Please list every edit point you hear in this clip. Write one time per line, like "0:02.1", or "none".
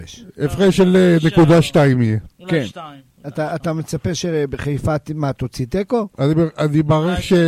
none